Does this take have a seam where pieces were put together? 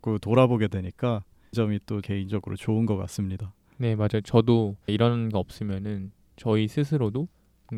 yes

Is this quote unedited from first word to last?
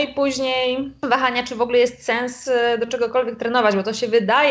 yes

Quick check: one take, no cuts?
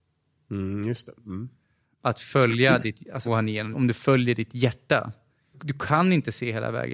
no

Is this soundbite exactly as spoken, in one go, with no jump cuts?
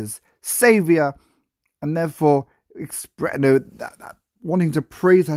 yes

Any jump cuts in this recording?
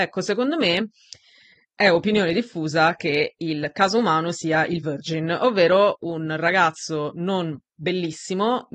no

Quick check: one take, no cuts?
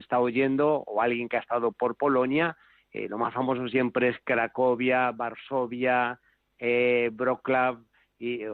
yes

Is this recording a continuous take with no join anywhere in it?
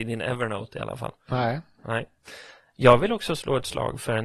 yes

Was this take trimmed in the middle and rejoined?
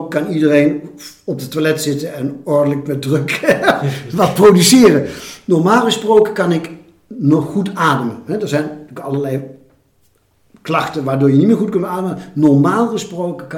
no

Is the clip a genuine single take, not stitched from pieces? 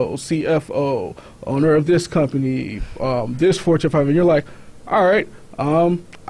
yes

